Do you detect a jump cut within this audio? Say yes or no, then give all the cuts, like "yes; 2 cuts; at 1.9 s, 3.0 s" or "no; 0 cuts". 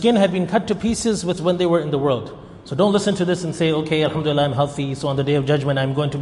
yes; 1 cut; at 1.4 s